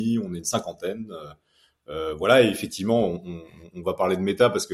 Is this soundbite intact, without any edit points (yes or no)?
yes